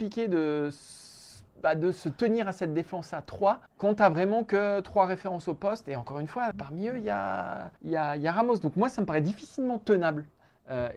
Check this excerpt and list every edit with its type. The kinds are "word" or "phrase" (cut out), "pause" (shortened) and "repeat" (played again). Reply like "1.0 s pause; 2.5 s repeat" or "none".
3.7 s pause; 6.5 s word; 7.8 s pause